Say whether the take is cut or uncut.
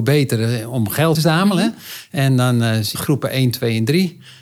cut